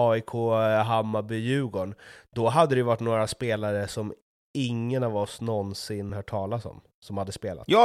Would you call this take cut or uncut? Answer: uncut